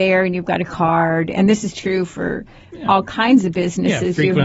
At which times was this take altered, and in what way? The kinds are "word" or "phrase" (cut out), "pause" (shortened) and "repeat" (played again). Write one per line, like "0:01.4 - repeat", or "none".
none